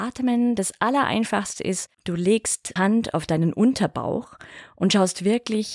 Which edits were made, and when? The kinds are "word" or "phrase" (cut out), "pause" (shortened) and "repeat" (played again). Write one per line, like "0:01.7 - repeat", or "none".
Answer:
0:01.9 - pause
0:02.8 - word